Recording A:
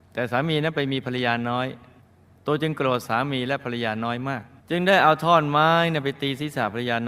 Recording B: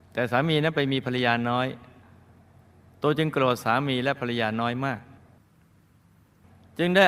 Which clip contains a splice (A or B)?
A